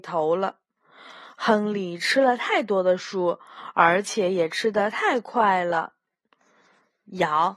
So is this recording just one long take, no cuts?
yes; 0 cuts

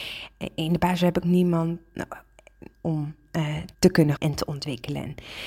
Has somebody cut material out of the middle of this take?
yes; 4 cuts; at 1.2 s, 2.7 s, 3.7 s, 4.2 s

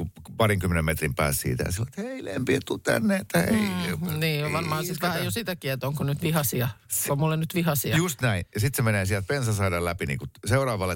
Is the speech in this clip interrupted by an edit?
yes; 1 cut; at 7.1 s

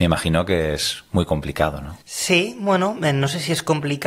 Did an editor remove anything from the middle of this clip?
yes; 1 cut; at 2.0 s

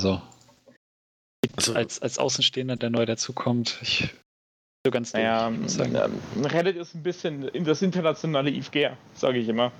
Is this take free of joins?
yes; 0 cuts

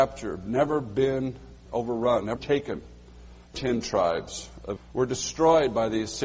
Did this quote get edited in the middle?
yes; 4 cuts; at 1.7 s, 2.4 s, 3.5 s, 4.8 s

